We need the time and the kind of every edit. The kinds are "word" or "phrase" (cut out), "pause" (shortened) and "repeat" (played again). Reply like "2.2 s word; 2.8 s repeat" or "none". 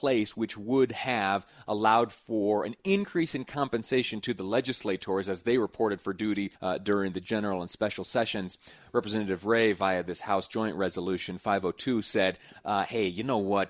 6.5 s pause